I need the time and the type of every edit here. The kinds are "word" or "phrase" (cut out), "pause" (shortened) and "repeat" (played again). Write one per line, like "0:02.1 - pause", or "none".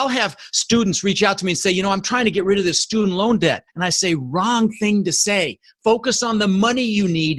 0:03.7 - pause